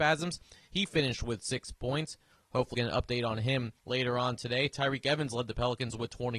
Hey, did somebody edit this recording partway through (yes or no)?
yes